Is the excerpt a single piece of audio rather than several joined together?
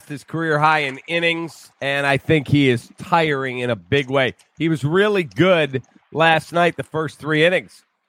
no; 1 cut; at 1.7 s

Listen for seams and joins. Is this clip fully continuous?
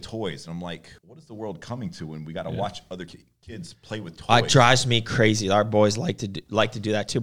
no; 1 cut; at 1.0 s

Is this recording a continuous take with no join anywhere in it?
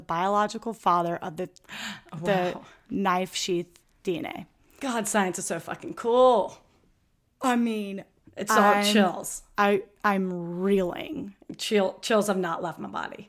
yes; 0 cuts

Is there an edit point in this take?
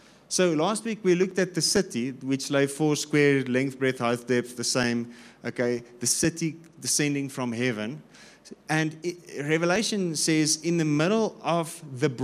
no; 0 cuts

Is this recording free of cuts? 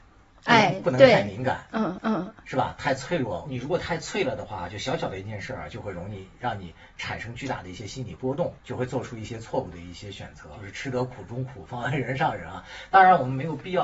no; 2 cuts; at 2.0 s, 8.6 s

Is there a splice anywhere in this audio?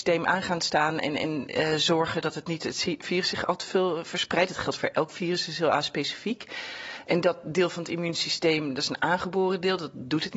no; 0 cuts

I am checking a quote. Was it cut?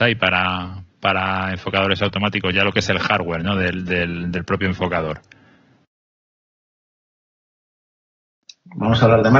no; 0 cuts

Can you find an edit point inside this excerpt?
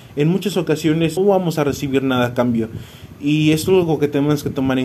yes; 1 cut; at 1.2 s

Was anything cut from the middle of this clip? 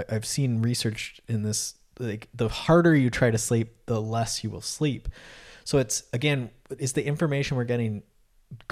no; 0 cuts

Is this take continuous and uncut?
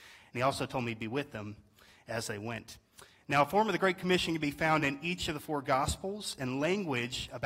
yes; 0 cuts

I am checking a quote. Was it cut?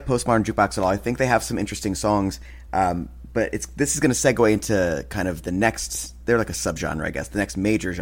no; 0 cuts

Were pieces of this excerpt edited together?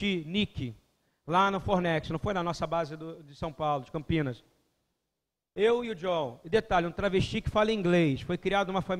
no; 0 cuts

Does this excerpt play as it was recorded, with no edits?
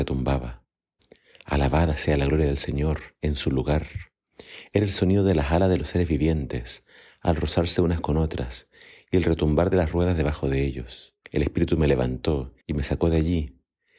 no; 3 cuts; at 3.1 s, 11.2 s, 12.6 s

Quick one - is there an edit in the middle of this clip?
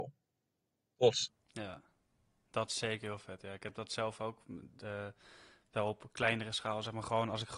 no; 0 cuts

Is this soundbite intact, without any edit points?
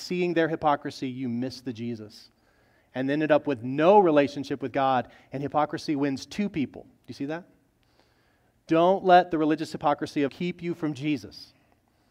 no; 2 cuts; at 7.0 s, 10.3 s

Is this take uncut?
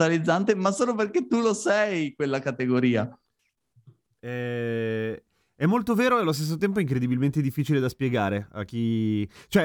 yes; 0 cuts

